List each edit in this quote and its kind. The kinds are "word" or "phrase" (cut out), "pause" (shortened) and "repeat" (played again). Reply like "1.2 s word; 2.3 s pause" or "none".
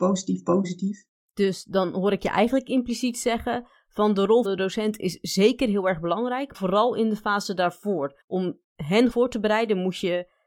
4.4 s word; 6.5 s word; 8.2 s pause; 9.1 s word